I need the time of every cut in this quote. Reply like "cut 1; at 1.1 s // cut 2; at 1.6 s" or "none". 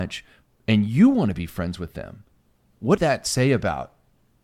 cut 1; at 3.0 s